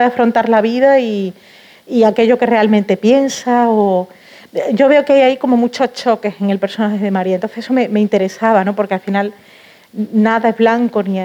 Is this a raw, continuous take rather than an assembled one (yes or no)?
yes